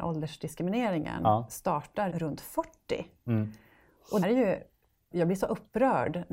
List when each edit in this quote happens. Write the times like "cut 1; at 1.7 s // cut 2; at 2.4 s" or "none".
cut 1; at 2.1 s // cut 2; at 4.2 s // cut 3; at 5.1 s